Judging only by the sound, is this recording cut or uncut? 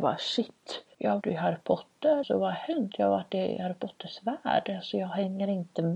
cut